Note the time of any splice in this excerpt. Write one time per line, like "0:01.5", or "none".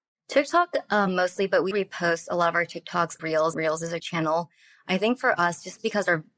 0:01.7
0:03.2
0:03.5
0:04.0